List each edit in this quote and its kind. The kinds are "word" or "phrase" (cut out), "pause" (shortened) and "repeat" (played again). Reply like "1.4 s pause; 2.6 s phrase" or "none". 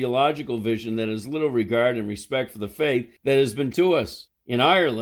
3.7 s word